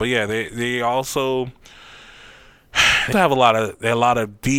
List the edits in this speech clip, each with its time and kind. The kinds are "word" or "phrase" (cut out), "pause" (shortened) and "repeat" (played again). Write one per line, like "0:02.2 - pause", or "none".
0:03.1 - word